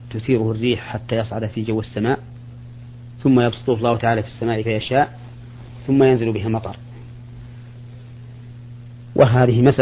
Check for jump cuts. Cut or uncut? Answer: cut